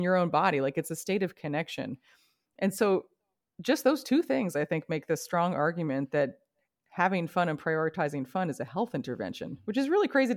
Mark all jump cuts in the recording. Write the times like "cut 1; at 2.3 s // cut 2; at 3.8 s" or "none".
none

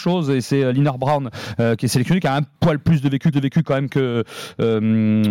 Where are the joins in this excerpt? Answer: cut 1; at 3.3 s

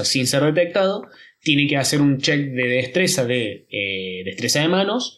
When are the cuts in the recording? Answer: none

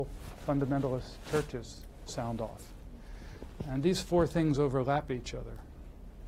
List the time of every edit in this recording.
none

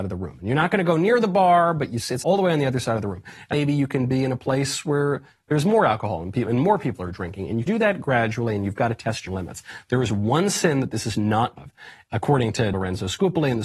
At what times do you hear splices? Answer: cut 1; at 2.2 s // cut 2; at 3.5 s // cut 3; at 7.7 s // cut 4; at 9.3 s // cut 5; at 11.6 s // cut 6; at 12.7 s

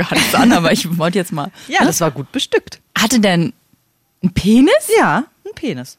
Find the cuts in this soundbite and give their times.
cut 1; at 2.9 s

